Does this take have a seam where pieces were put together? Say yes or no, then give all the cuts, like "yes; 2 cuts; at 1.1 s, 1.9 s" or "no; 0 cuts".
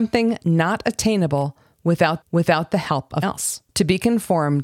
yes; 3 cuts; at 2.2 s, 3.2 s, 3.7 s